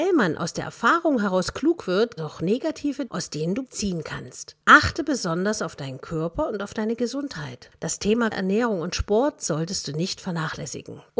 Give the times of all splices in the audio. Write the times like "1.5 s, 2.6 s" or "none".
2.2 s, 3.1 s, 3.6 s, 8.3 s